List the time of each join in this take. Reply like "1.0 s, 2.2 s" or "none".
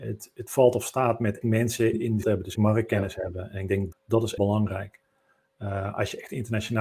1.4 s, 1.9 s, 2.2 s, 2.6 s, 3.9 s, 4.4 s